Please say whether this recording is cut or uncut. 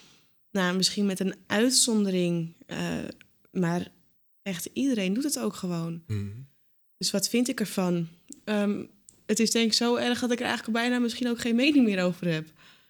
uncut